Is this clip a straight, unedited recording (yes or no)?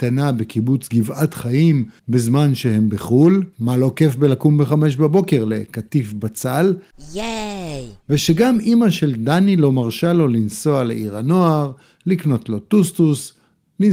no